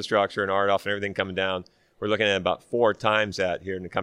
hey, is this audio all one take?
yes; 0 cuts

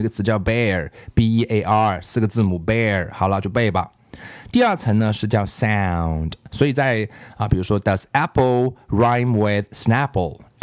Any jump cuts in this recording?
no; 0 cuts

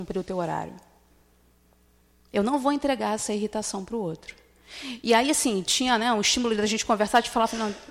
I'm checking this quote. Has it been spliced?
no; 0 cuts

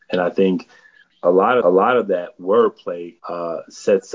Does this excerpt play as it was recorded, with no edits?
no; 2 cuts; at 1.6 s, 3.2 s

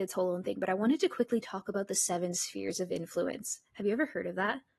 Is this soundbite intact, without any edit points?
yes; 0 cuts

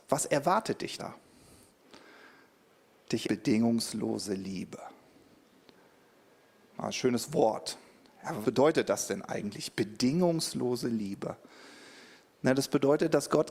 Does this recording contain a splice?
yes; 3 cuts; at 1.0 s, 3.2 s, 8.4 s

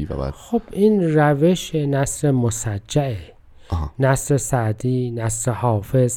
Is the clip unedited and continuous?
yes; 0 cuts

